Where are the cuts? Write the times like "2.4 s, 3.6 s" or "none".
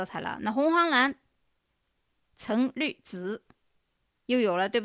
none